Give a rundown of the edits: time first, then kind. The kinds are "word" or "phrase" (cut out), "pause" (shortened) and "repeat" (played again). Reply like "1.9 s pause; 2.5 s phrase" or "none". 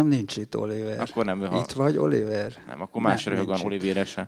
none